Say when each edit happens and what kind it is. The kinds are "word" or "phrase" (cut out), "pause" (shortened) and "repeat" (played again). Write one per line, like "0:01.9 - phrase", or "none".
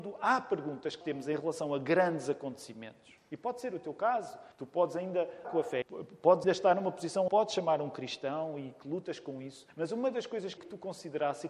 0:01.0 - word
0:04.5 - pause
0:05.4 - word
0:05.8 - word
0:06.4 - word
0:07.3 - phrase
0:09.7 - pause
0:10.6 - phrase

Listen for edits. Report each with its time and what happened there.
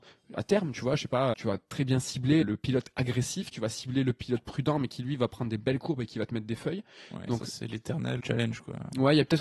0:01.3 - word
0:02.4 - word
0:08.2 - word

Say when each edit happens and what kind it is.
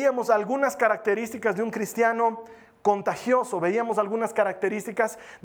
none

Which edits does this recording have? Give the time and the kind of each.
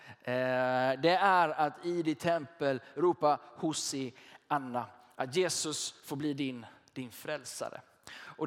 none

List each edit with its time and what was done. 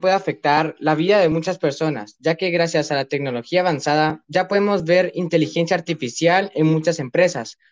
none

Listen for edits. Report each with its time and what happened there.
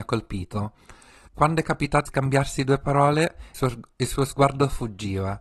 0:02.1 - word
0:03.5 - word

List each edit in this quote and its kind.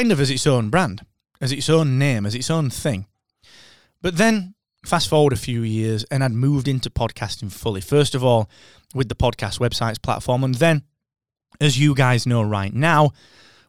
none

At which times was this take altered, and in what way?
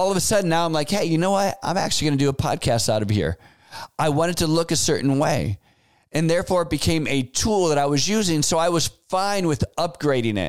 none

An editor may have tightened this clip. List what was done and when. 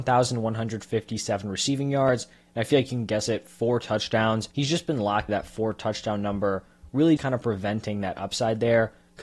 0:04.5 - pause
0:05.3 - word
0:07.2 - word

